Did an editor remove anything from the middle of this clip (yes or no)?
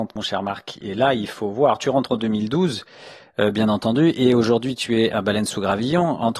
no